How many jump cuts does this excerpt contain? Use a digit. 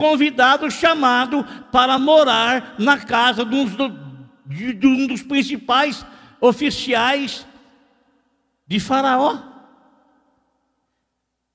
0